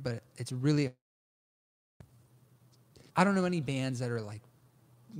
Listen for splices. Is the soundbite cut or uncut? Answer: cut